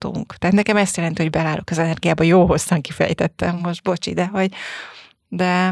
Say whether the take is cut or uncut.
uncut